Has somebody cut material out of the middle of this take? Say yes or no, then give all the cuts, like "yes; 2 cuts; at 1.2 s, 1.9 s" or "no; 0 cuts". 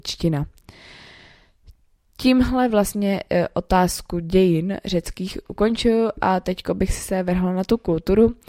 no; 0 cuts